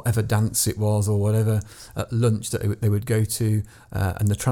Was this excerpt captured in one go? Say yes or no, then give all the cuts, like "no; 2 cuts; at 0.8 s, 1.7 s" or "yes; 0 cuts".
yes; 0 cuts